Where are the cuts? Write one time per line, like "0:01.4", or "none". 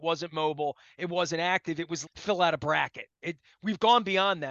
0:02.1